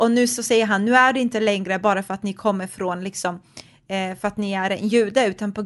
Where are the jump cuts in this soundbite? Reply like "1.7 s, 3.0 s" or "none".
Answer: none